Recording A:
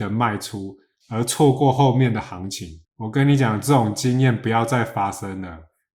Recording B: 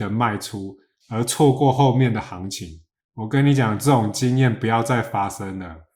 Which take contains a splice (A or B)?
A